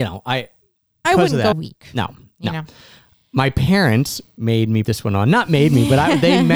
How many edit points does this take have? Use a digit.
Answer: 3